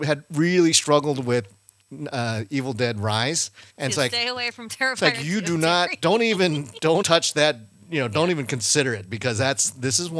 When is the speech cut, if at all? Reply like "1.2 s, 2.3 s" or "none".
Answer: 3.7 s, 7.0 s